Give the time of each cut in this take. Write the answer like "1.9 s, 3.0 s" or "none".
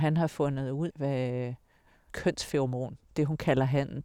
0.9 s, 2.1 s